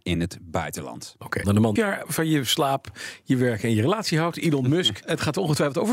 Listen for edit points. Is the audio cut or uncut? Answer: cut